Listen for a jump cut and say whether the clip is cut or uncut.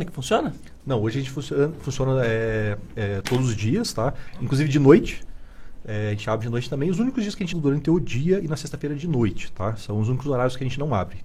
cut